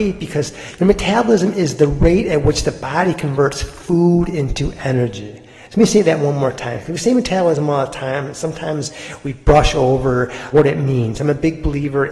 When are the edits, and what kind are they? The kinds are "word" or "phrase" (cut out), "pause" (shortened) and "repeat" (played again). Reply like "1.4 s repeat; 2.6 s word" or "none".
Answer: 10.5 s word